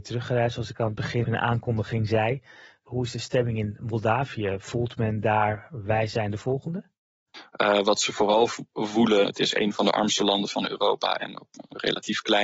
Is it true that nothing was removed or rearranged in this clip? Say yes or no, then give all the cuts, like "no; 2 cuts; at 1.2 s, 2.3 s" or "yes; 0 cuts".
no; 2 cuts; at 1.2 s, 9.2 s